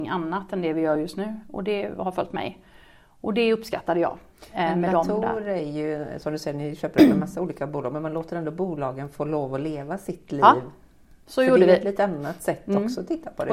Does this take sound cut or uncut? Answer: uncut